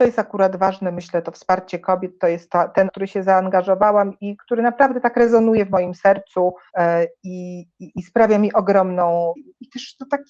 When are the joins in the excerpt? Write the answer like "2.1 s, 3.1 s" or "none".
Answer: 2.9 s, 4.2 s, 6.7 s, 9.4 s